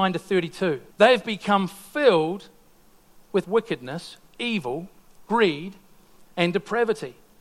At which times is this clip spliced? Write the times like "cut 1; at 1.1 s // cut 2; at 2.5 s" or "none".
cut 1; at 0.9 s // cut 2; at 3.4 s